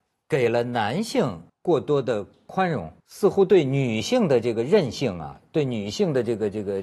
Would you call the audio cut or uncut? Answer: cut